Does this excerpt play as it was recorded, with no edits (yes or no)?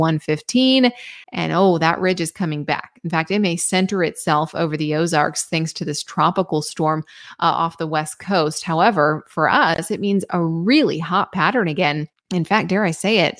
no